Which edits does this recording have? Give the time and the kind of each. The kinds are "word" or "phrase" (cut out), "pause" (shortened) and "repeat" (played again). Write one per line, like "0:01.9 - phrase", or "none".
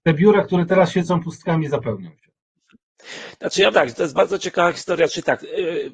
0:03.7 - word